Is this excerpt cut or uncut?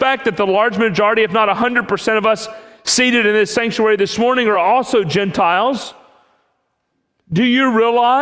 uncut